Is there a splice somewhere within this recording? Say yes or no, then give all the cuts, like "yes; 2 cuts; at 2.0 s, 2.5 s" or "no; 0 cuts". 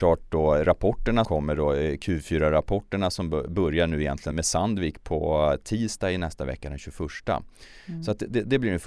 yes; 2 cuts; at 1.2 s, 4.3 s